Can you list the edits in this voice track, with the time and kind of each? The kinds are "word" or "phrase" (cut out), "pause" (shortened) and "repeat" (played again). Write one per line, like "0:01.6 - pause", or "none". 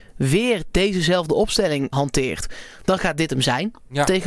0:01.9 - word